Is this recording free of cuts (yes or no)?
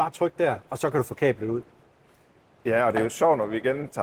yes